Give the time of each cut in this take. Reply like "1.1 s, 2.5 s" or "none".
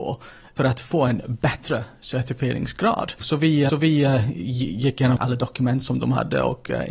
3.7 s, 5.2 s